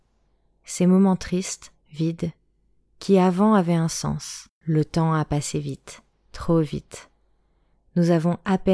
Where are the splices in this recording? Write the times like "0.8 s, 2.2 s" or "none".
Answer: 1.8 s, 4.6 s, 6.1 s

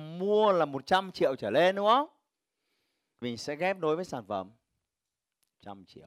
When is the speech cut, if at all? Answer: 3.2 s

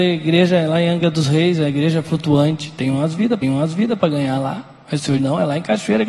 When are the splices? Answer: 3.4 s, 5.2 s

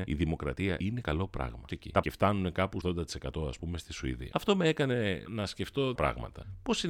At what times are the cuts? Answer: 1.7 s, 2.0 s, 2.8 s, 5.3 s, 6.0 s

